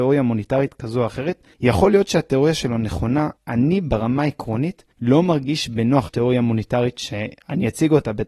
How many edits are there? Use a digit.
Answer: 4